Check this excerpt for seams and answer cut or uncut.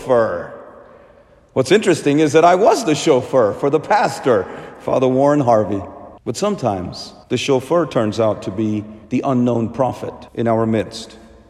cut